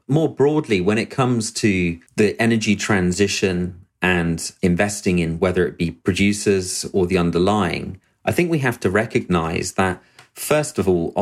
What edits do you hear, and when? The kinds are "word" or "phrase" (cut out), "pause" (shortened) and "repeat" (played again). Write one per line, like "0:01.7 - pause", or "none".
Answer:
0:02.1 - pause
0:04.6 - word